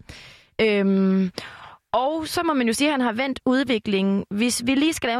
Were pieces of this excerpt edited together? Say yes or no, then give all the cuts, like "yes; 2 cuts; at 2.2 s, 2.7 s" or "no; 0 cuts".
no; 0 cuts